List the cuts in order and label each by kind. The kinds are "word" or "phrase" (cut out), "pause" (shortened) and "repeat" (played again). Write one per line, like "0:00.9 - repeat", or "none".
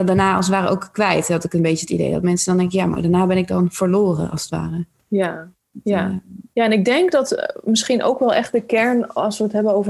0:06.5 - pause

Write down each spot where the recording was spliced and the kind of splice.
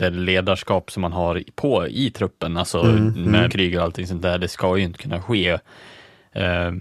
0:03.5 - word

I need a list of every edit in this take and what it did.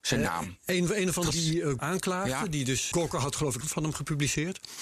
0:01.3 - word
0:01.8 - word
0:02.9 - word
0:03.6 - phrase

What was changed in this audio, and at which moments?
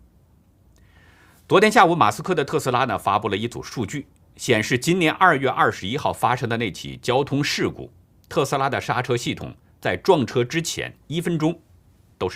0:11.0 - pause

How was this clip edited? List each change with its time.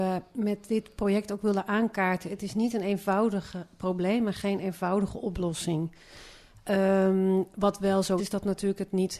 0:08.2 - word

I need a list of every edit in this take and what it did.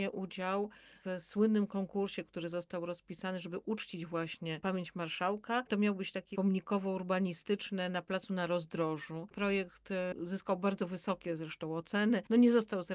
0:06.3 - phrase

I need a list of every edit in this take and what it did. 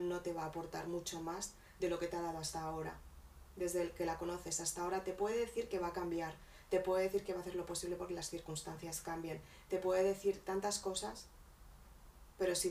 none

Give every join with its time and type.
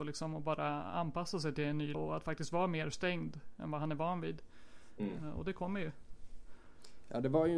0:01.9 - word

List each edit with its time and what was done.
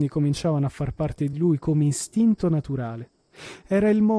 none

